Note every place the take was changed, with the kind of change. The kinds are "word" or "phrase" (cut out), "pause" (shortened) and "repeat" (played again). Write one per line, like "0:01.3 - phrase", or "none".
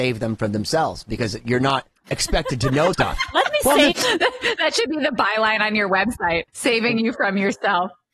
0:02.9 - word
0:03.9 - phrase
0:06.5 - pause